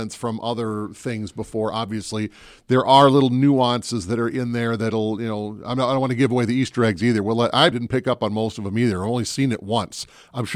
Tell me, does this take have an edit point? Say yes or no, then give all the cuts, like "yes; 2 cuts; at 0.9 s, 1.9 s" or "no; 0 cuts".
yes; 1 cut; at 7.7 s